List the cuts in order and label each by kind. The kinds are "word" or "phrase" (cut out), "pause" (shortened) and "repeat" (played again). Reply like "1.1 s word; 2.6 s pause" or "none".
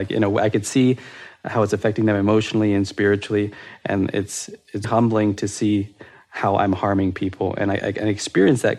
4.8 s word